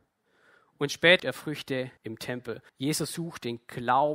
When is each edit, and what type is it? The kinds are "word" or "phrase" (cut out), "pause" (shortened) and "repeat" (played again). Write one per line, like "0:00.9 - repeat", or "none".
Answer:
0:01.2 - word
0:02.0 - pause
0:02.7 - pause